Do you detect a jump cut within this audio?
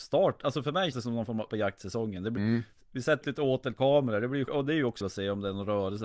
yes; 6 cuts; at 0.9 s, 1.5 s, 2.4 s, 3.2 s, 4.5 s, 5.0 s

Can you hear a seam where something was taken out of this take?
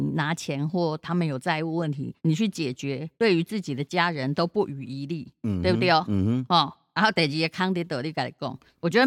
yes; 2 cuts; at 2.2 s, 3.1 s

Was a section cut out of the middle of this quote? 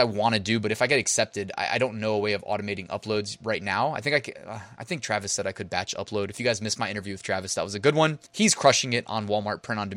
yes; 1 cut; at 8.3 s

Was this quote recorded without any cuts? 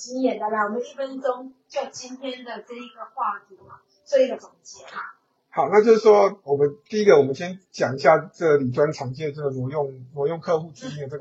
yes; 0 cuts

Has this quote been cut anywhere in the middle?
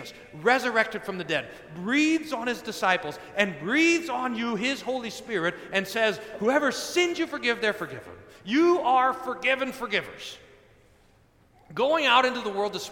no; 0 cuts

